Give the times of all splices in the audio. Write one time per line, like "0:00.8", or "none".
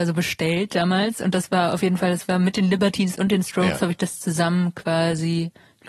none